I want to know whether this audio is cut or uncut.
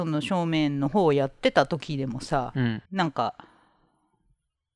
cut